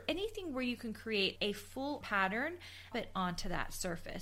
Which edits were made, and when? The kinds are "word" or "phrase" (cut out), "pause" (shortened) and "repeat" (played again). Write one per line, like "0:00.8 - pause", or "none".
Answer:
0:01.4 - word
0:02.0 - word
0:02.9 - phrase